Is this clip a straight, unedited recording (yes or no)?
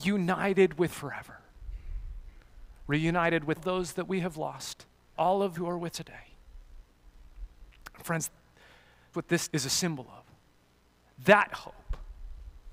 no